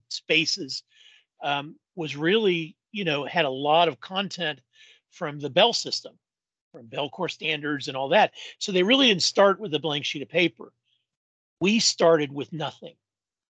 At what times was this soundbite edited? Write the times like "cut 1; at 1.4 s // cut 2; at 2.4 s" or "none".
none

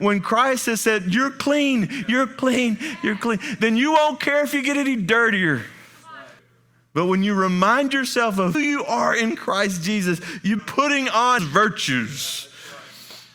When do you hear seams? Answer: cut 1; at 6.4 s // cut 2; at 8.5 s // cut 3; at 10.6 s // cut 4; at 11.4 s

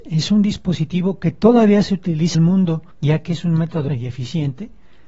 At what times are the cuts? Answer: cut 1; at 2.3 s // cut 2; at 2.9 s // cut 3; at 3.9 s

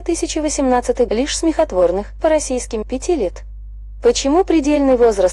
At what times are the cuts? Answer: cut 1; at 1.1 s // cut 2; at 2.2 s // cut 3; at 2.8 s

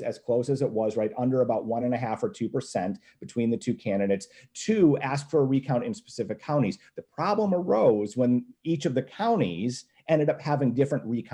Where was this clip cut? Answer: none

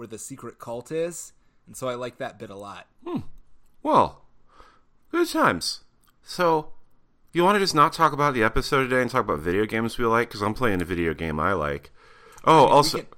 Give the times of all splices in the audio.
cut 1; at 2.9 s

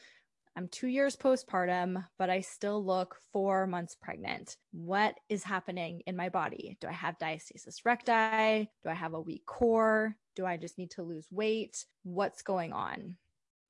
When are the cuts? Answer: cut 1; at 4.6 s // cut 2; at 8.7 s // cut 3; at 11.9 s

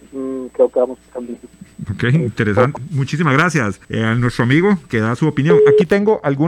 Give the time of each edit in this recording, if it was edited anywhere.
cut 1; at 1.1 s // cut 2; at 2.8 s // cut 3; at 3.8 s

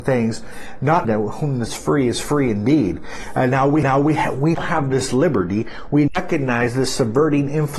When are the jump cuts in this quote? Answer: cut 1; at 1.0 s // cut 2; at 1.7 s // cut 3; at 3.8 s // cut 4; at 4.5 s // cut 5; at 6.1 s

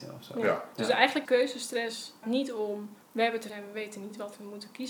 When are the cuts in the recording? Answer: cut 1; at 1.3 s // cut 2; at 2.2 s // cut 3; at 3.0 s // cut 4; at 3.5 s

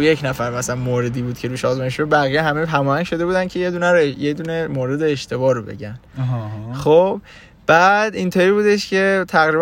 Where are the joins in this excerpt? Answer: none

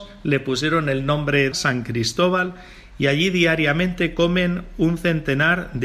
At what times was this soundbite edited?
cut 1; at 1.5 s

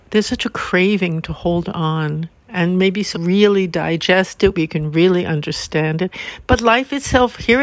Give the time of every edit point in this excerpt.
cut 1; at 2.4 s // cut 2; at 3.1 s

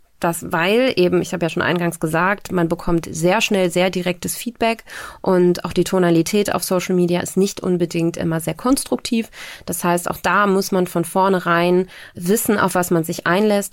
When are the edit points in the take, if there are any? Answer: cut 1; at 12.1 s

